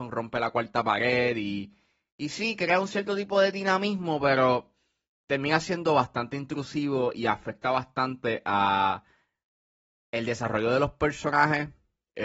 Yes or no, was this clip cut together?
no